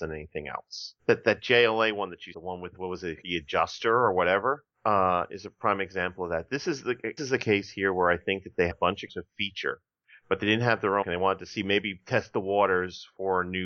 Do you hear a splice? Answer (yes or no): yes